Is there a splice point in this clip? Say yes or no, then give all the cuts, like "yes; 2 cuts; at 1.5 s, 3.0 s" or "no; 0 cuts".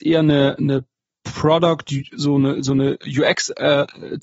no; 0 cuts